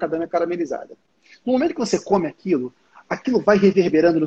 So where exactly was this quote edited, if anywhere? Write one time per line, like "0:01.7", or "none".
none